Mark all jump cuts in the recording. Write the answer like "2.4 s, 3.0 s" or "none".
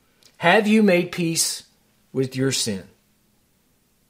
none